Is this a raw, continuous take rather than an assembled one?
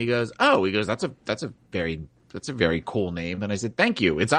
yes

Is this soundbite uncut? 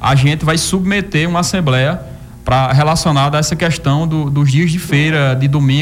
yes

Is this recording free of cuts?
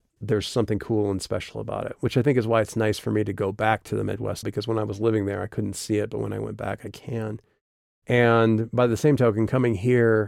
no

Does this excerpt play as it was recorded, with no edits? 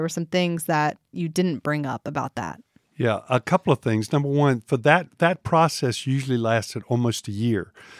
yes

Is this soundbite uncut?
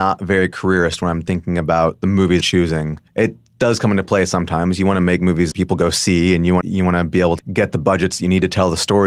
no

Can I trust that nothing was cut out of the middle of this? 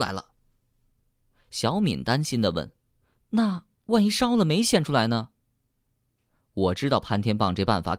yes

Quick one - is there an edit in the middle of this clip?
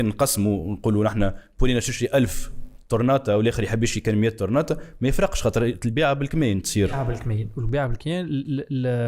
no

